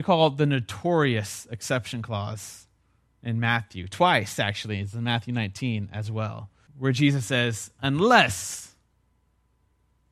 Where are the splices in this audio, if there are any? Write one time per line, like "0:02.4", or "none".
0:06.7